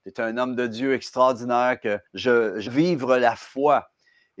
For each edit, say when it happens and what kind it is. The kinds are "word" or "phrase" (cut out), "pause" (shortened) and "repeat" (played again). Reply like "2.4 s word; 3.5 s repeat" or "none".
2.1 s pause; 2.7 s word